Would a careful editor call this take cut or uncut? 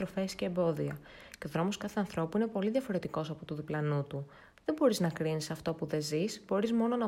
uncut